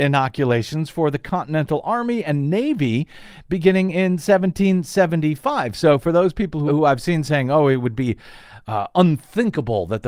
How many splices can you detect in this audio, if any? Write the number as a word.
one